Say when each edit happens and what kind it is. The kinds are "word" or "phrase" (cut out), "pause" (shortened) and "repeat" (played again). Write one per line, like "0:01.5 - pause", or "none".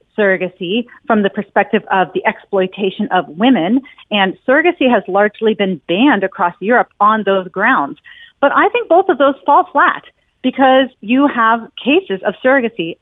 none